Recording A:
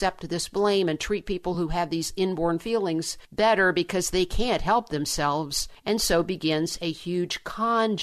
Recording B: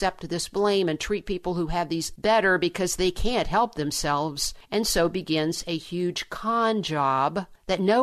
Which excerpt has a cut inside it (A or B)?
B